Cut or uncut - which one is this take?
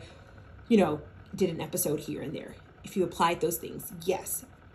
uncut